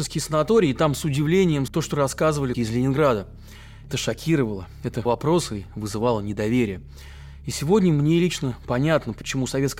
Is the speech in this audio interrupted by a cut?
yes; 4 cuts; at 1.7 s, 2.5 s, 3.9 s, 5.1 s

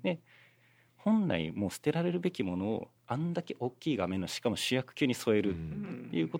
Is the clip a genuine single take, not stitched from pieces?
no; 1 cut; at 3.0 s

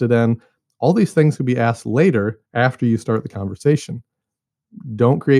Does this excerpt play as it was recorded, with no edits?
no; 1 cut; at 2.5 s

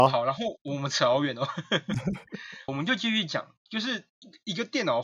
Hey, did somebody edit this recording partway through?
yes; 1 cut; at 2.7 s

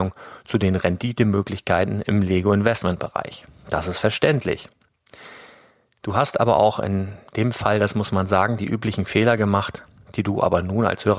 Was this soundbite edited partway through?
no; 0 cuts

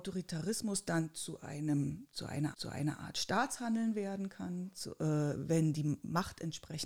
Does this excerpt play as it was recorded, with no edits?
no; 1 cut; at 2.5 s

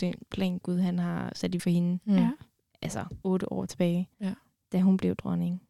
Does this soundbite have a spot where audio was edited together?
yes; 3 cuts; at 1.6 s, 3.2 s, 4.1 s

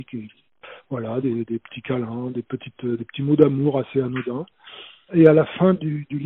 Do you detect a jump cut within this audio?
no; 0 cuts

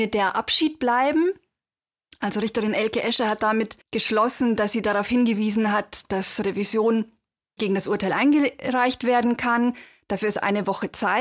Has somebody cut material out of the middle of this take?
yes; 2 cuts; at 3.8 s, 7.6 s

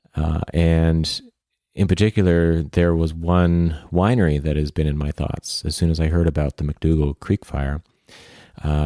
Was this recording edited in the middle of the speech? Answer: no; 0 cuts

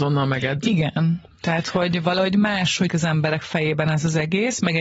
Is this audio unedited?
no; 1 cut; at 2.9 s

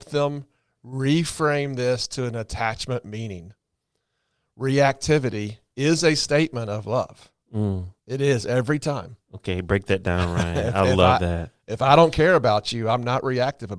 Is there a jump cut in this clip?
yes; 2 cuts; at 8.0 s, 9.2 s

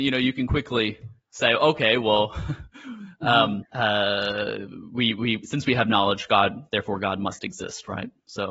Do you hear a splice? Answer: yes; 1 cut; at 3.7 s

